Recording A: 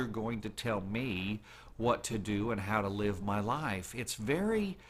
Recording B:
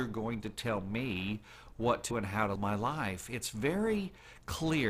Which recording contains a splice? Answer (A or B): B